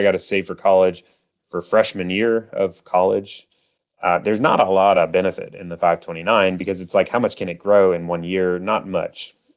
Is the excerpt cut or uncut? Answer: uncut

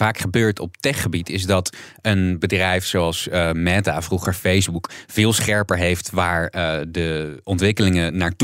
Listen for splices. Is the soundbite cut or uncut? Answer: uncut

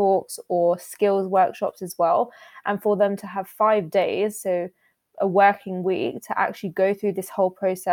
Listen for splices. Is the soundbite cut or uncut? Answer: uncut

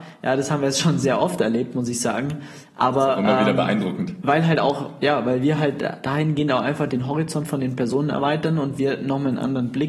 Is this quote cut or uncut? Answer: uncut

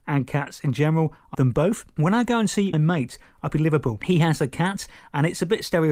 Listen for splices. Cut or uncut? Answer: cut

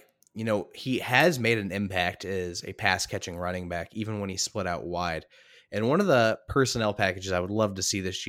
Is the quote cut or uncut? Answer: uncut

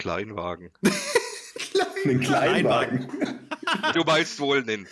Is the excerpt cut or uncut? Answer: cut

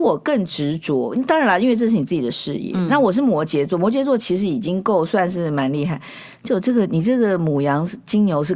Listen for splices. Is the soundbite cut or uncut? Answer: uncut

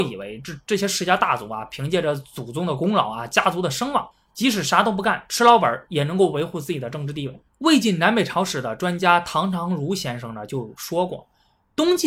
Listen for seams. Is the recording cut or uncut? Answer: cut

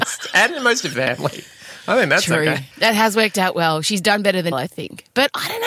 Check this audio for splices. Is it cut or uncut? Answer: cut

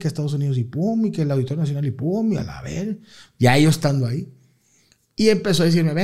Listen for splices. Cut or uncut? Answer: uncut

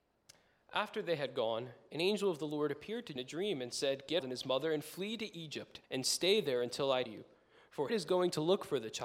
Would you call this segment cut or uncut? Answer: cut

